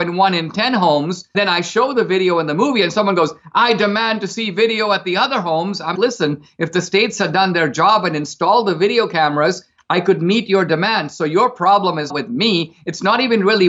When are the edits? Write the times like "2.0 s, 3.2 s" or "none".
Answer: 1.3 s, 5.9 s, 12.1 s